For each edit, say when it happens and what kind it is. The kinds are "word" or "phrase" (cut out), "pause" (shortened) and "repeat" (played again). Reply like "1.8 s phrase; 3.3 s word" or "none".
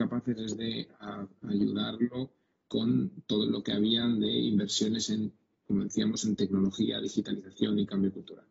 none